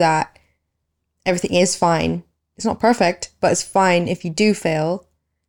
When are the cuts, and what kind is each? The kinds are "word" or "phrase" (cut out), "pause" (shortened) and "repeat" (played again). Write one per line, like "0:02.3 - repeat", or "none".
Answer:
none